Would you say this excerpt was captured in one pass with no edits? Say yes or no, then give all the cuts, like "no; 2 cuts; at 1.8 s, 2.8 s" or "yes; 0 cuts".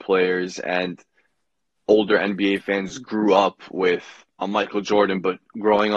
yes; 0 cuts